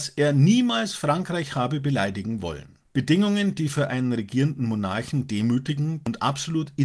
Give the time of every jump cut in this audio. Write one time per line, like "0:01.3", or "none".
0:02.9